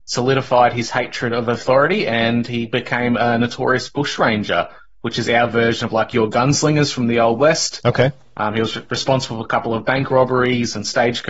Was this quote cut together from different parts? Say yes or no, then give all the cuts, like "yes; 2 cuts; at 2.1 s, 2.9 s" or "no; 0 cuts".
no; 0 cuts